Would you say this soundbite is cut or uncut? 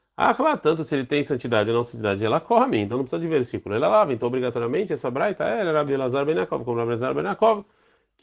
uncut